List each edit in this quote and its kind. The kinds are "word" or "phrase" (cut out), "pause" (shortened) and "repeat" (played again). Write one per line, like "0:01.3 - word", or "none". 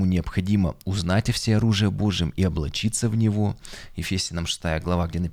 none